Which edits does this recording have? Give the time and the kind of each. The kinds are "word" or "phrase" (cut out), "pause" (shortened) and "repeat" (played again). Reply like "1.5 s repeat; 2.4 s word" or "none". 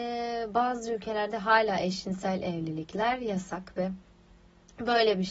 none